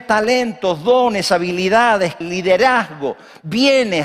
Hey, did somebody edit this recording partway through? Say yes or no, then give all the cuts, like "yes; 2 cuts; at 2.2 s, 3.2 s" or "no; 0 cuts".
yes; 1 cut; at 2.2 s